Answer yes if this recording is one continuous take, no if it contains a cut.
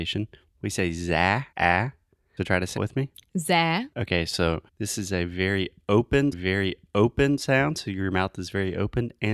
no